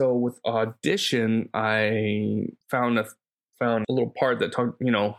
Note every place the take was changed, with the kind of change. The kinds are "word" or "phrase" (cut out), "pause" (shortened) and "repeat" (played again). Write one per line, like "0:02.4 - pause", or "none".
0:02.6 - pause
0:03.8 - word